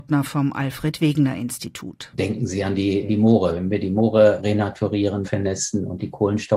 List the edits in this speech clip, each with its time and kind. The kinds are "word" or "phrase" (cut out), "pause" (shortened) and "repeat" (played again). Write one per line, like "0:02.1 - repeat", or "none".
0:03.1 - word
0:04.4 - word
0:05.2 - word